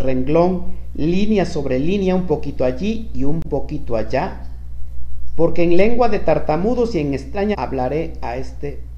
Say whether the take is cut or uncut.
cut